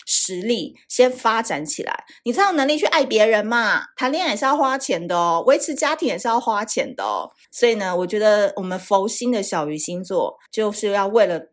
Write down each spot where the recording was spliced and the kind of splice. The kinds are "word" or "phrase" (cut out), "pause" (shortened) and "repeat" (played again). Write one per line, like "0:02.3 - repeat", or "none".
0:07.4 - pause
0:10.5 - pause